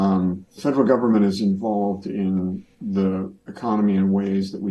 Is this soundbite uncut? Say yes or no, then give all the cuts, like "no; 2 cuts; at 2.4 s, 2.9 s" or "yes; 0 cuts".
no; 1 cut; at 2.7 s